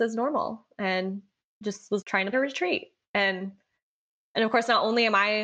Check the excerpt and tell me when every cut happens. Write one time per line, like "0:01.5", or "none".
0:02.0
0:02.3